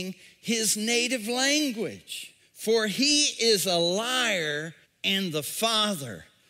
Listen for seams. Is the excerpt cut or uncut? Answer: cut